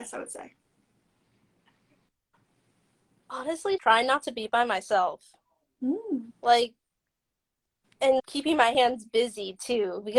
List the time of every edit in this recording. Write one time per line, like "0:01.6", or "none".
0:03.8
0:06.3
0:08.2

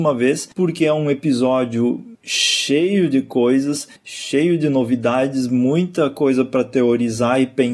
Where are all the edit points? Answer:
0:04.0

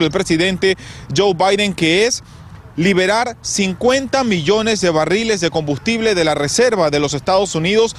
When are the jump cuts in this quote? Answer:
none

